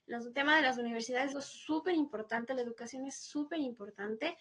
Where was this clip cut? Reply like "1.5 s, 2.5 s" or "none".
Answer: 1.3 s